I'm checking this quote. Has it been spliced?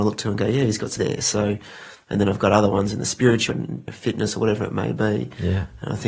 yes; 3 cuts; at 1.0 s, 3.5 s, 3.9 s

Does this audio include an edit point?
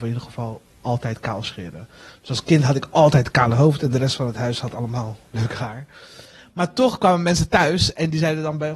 no; 0 cuts

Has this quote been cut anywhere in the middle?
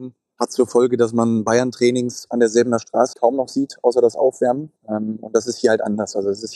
yes; 2 cuts; at 3.1 s, 4.8 s

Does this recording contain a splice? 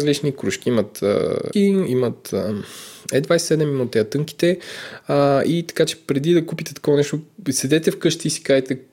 yes; 1 cut; at 1.5 s

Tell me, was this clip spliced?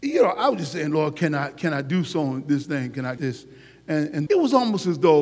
yes; 2 cuts; at 3.2 s, 4.3 s

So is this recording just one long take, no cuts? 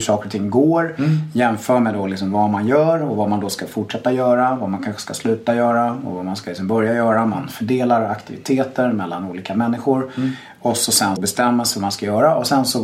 no; 1 cut; at 11.2 s

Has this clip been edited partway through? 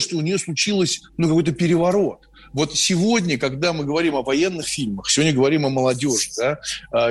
yes; 1 cut; at 1.1 s

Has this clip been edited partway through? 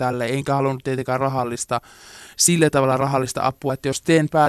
no; 0 cuts

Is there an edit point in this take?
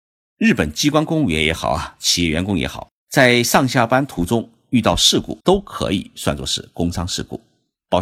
yes; 2 cuts; at 3.0 s, 5.4 s

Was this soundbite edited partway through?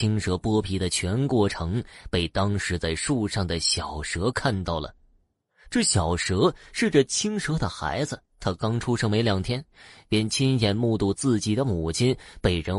yes; 1 cut; at 8.2 s

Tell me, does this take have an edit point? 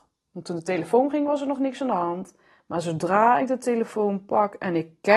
no; 0 cuts

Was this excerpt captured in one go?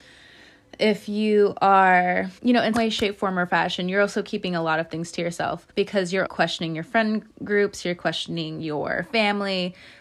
no; 4 cuts; at 2.4 s, 2.7 s, 5.7 s, 6.3 s

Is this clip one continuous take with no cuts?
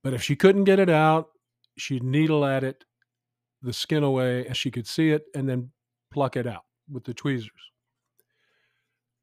no; 1 cut; at 4.5 s

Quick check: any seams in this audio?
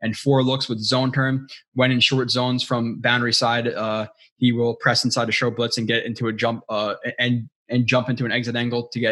no; 0 cuts

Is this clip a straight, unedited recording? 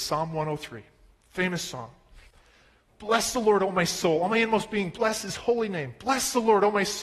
yes; 0 cuts

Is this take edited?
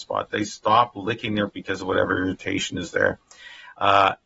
yes; 1 cut; at 1.5 s

